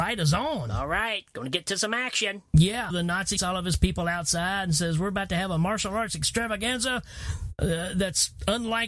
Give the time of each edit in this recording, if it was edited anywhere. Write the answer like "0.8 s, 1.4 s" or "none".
2.9 s, 3.4 s